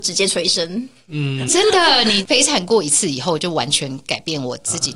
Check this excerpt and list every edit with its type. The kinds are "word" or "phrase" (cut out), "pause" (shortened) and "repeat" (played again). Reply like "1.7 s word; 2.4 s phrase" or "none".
1.5 s word